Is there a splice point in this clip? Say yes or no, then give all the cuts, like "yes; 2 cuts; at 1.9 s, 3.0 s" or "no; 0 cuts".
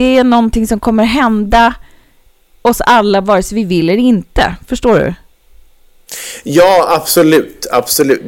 no; 0 cuts